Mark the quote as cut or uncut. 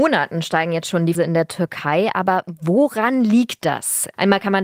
cut